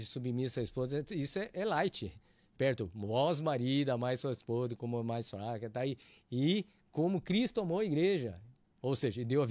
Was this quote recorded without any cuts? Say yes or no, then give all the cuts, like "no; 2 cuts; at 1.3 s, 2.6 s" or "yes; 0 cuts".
yes; 0 cuts